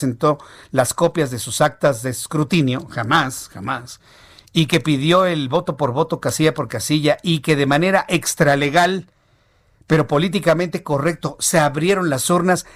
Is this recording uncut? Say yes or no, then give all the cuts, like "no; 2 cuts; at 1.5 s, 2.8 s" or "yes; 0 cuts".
yes; 0 cuts